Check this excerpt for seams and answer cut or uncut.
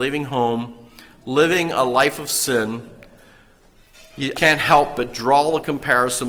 cut